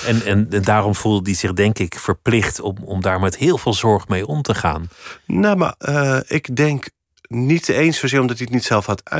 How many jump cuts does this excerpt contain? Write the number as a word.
two